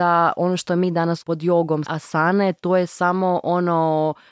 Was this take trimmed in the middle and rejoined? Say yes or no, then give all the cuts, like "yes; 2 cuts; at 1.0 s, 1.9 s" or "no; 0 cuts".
yes; 2 cuts; at 1.2 s, 1.9 s